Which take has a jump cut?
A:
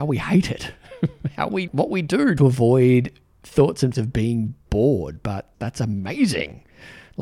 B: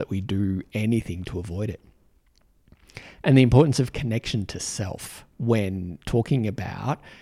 A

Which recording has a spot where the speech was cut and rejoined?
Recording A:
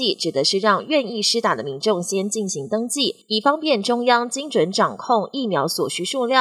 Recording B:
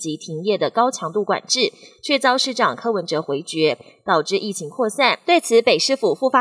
A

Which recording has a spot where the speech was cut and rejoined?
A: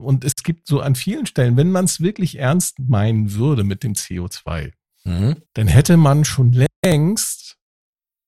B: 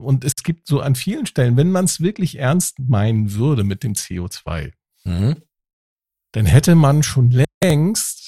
A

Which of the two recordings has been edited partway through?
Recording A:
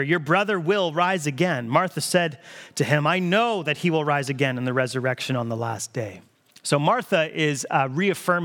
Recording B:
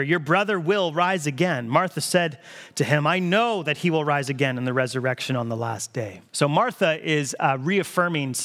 B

